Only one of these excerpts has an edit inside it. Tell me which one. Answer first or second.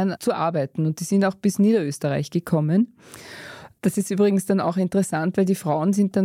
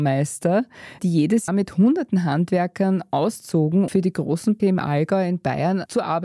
second